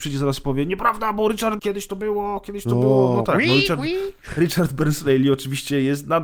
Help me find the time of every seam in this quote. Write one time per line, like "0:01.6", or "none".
0:01.6